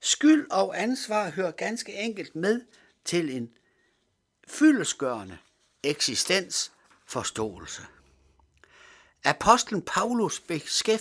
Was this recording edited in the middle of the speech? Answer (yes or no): no